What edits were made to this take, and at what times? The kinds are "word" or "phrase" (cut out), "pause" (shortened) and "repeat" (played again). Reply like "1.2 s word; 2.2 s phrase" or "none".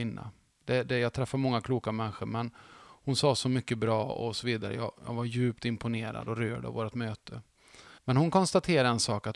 8.0 s pause